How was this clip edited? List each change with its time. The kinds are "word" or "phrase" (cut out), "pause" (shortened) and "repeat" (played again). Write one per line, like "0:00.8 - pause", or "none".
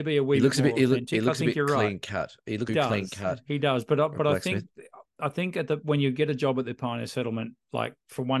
0:02.7 - phrase